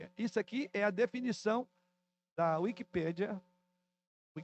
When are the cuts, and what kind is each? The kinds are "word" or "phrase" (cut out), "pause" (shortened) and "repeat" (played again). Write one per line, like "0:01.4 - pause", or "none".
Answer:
none